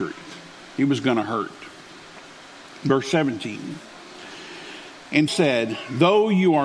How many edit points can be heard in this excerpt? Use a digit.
1